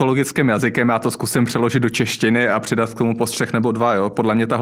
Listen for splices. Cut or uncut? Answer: uncut